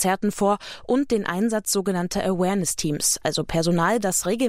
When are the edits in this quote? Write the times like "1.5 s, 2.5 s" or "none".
none